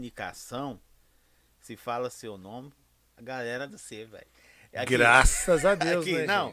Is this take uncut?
no; 1 cut; at 3.7 s

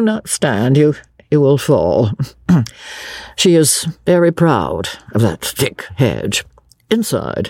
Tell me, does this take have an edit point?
no; 0 cuts

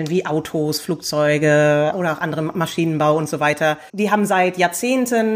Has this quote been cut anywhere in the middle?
yes; 2 cuts; at 1.9 s, 3.9 s

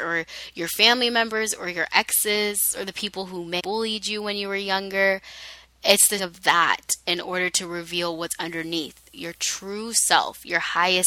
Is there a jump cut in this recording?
yes; 2 cuts; at 3.6 s, 6.2 s

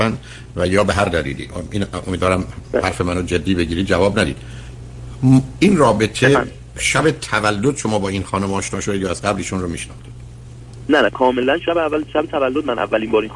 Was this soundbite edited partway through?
no; 0 cuts

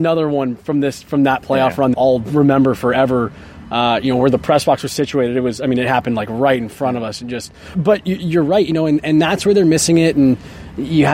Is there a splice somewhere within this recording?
yes; 2 cuts; at 1.9 s, 7.7 s

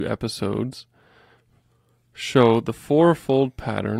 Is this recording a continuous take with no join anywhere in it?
yes; 0 cuts

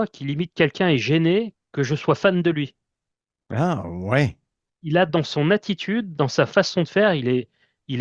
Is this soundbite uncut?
yes; 0 cuts

